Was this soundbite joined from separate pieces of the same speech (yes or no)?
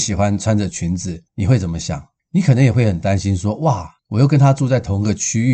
yes